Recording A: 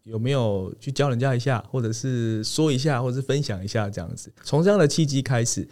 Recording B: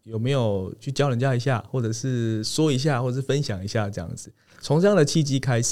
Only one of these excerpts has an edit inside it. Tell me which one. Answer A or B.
A